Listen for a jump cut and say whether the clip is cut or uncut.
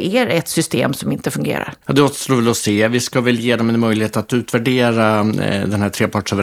cut